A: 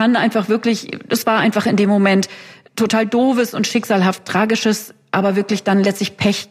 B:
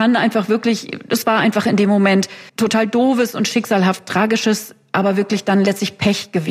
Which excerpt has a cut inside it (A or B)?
B